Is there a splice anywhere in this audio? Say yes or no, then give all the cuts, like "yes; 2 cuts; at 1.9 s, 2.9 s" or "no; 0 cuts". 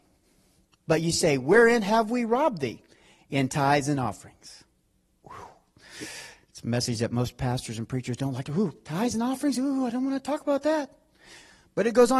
no; 0 cuts